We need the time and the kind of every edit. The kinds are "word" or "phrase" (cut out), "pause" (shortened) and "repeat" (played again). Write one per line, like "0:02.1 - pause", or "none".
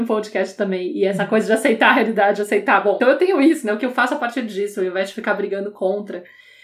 0:03.0 - word